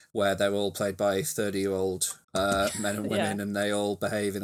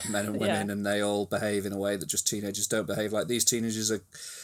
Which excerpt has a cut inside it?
first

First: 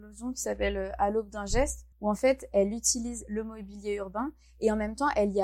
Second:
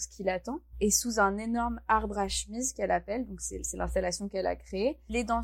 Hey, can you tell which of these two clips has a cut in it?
first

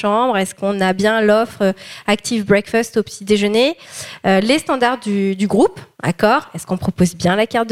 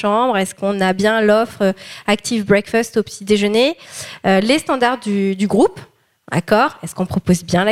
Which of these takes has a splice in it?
first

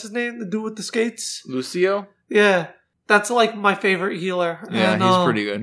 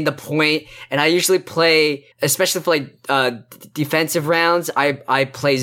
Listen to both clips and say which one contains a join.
second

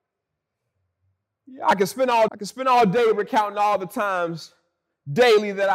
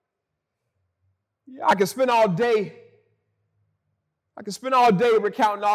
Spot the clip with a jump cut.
first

